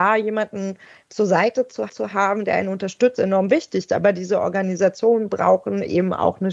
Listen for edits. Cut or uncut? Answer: cut